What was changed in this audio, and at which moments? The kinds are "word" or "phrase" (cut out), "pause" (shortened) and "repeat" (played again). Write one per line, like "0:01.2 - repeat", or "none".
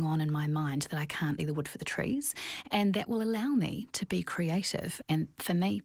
0:01.4 - word